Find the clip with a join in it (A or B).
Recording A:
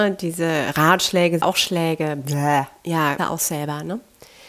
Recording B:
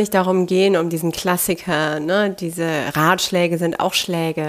A